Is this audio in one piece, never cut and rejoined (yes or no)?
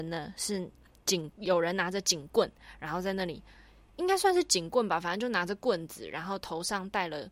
yes